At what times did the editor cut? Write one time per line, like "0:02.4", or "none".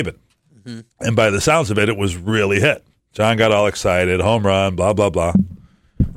0:00.9
0:03.0